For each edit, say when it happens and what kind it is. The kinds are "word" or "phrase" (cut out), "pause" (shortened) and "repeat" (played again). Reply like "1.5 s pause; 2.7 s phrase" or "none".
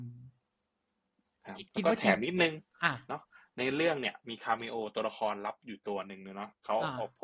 1.7 s pause